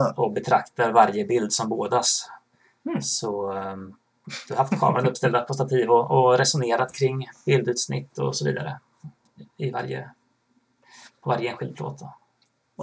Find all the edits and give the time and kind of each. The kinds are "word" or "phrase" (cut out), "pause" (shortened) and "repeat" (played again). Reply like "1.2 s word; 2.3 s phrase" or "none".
none